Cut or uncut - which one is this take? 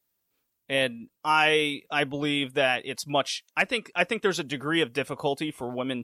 uncut